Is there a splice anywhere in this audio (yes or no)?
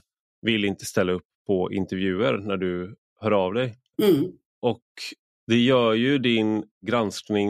no